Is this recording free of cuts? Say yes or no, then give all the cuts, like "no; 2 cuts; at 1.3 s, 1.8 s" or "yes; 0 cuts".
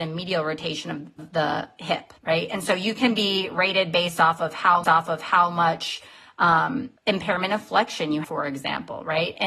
no; 5 cuts; at 1.2 s, 2.2 s, 4.8 s, 7.0 s, 8.2 s